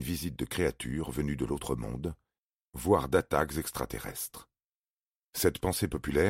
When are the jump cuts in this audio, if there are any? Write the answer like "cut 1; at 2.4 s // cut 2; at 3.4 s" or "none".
none